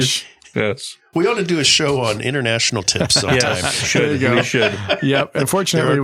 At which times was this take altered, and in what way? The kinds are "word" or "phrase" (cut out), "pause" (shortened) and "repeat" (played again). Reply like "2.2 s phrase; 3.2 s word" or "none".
2.8 s word; 3.8 s word